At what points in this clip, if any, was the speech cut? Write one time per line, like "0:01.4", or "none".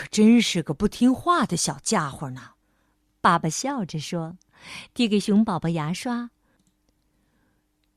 0:02.6